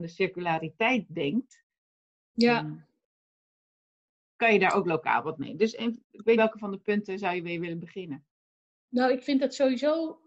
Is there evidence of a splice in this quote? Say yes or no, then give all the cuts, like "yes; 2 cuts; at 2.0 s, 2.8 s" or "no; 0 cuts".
yes; 1 cut; at 6.4 s